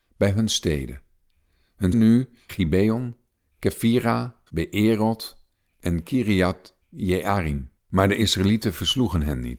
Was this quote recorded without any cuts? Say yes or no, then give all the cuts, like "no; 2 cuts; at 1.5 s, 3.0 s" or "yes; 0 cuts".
no; 4 cuts; at 1.9 s, 2.5 s, 4.5 s, 7.8 s